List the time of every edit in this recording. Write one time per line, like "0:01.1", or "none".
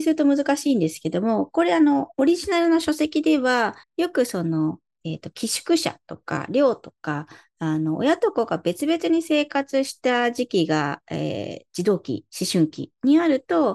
0:02.1
0:03.8
0:12.3